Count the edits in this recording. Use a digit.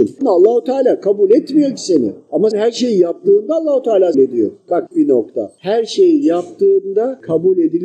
3